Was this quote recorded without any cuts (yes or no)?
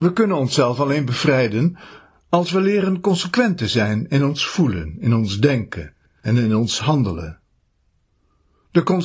yes